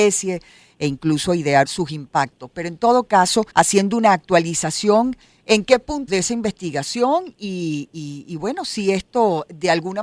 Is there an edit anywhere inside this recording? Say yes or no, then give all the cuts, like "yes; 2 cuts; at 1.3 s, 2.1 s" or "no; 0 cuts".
yes; 3 cuts; at 1.7 s, 3.5 s, 6.1 s